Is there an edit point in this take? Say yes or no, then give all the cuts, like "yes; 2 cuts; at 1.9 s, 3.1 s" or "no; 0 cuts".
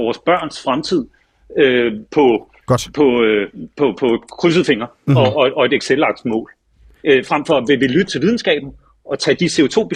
no; 0 cuts